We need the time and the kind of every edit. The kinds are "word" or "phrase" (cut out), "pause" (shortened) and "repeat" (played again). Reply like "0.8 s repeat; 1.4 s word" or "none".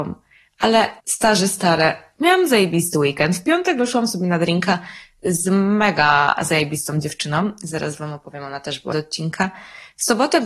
1.0 s pause; 8.9 s word